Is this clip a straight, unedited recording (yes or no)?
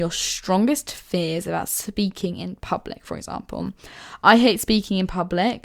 yes